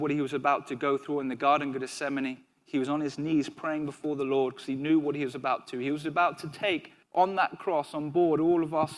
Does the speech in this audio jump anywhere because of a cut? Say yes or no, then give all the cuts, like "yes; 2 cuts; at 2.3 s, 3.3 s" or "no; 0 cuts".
yes; 1 cut; at 7.0 s